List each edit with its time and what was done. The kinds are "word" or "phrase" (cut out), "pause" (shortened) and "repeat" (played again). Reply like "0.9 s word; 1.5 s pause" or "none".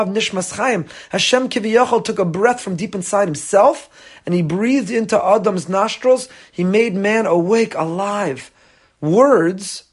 none